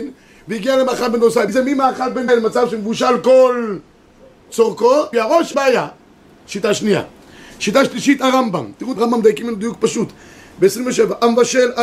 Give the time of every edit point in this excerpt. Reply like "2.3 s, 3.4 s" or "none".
1.5 s, 2.3 s, 5.1 s, 5.5 s, 9.0 s

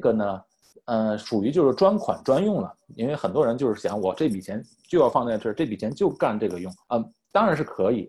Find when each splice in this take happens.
6.8 s

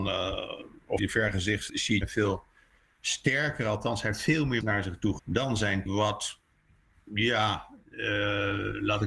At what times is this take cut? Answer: 1.0 s, 1.7 s, 2.0 s, 4.6 s, 5.2 s, 5.9 s

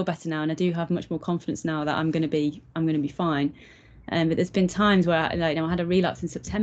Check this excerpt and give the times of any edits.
none

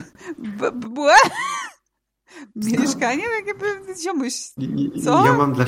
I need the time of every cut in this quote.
2.8 s

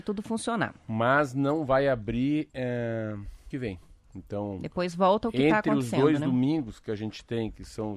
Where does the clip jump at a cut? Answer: 3.5 s

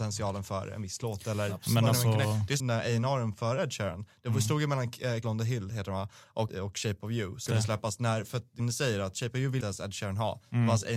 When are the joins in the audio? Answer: 2.6 s, 5.2 s, 6.5 s, 7.5 s, 8.6 s, 9.6 s

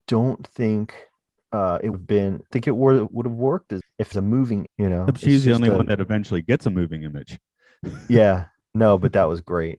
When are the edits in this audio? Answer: 1.9 s, 2.5 s, 3.8 s, 4.1 s, 4.7 s

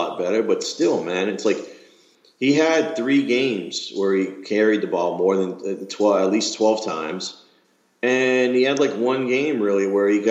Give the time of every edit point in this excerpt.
none

